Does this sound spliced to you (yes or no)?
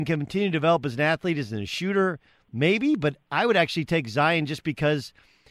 no